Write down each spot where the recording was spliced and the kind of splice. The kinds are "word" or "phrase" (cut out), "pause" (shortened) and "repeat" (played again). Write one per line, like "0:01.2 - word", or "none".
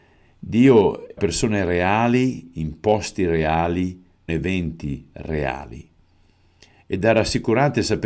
0:01.2 - word
0:04.3 - word